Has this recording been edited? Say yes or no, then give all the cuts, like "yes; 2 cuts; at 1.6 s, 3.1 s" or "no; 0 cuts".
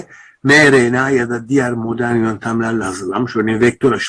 no; 0 cuts